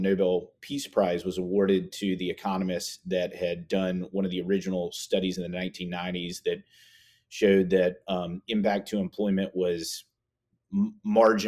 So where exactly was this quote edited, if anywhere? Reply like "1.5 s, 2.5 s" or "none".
none